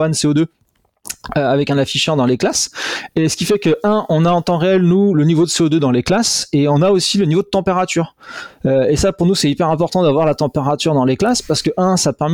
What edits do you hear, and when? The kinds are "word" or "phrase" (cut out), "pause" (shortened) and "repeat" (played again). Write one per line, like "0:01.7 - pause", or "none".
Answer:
none